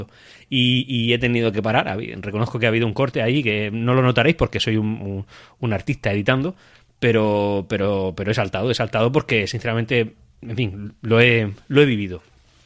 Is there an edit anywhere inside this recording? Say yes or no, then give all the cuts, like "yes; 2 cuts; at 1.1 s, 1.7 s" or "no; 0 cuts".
no; 0 cuts